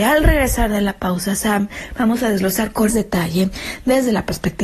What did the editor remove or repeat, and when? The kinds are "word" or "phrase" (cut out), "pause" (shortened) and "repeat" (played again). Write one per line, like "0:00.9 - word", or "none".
0:02.9 - word